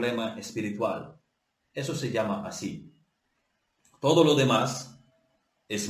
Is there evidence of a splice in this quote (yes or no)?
no